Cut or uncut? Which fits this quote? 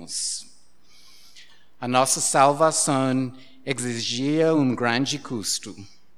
uncut